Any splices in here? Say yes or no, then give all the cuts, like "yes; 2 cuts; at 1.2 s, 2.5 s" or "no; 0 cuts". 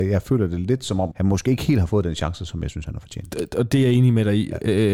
yes; 1 cut; at 1.1 s